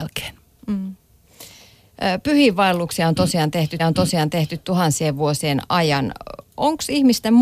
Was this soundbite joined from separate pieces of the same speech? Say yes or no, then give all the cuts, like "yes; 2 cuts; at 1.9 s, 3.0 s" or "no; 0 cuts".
yes; 1 cut; at 3.8 s